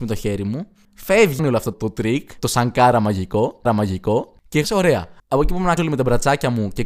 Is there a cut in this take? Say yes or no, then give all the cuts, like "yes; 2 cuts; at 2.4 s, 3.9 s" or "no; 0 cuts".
yes; 5 cuts; at 1.4 s, 1.7 s, 3.6 s, 4.6 s, 5.8 s